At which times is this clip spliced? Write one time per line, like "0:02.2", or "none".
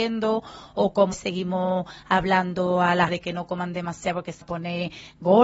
0:01.1
0:03.1
0:04.4